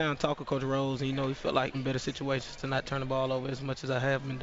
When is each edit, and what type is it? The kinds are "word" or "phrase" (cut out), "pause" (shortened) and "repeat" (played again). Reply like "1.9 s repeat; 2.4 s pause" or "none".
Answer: 1.7 s phrase